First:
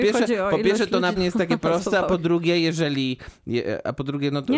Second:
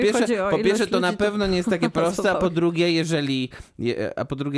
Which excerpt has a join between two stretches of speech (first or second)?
first